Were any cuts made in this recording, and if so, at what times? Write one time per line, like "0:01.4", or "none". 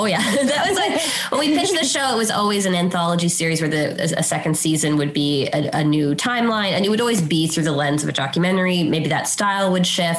none